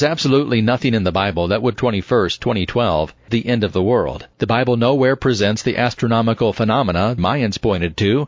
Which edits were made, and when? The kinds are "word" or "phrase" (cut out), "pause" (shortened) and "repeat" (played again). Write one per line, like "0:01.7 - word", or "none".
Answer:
0:01.8 - phrase
0:03.3 - word
0:04.3 - pause
0:07.2 - word